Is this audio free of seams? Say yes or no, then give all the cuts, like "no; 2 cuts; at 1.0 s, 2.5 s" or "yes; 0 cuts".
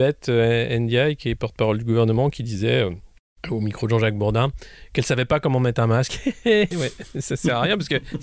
no; 2 cuts; at 3.3 s, 6.7 s